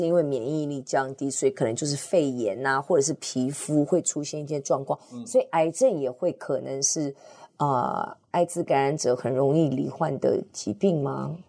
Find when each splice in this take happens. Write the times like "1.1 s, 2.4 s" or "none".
none